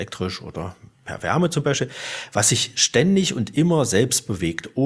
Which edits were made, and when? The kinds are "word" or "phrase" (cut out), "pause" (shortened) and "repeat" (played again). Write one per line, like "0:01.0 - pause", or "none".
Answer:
none